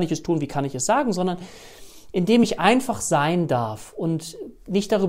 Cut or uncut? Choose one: uncut